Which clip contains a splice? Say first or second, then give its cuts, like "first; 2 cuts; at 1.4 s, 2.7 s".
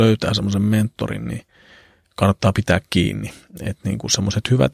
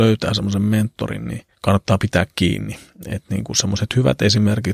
second; 1 cut; at 1.5 s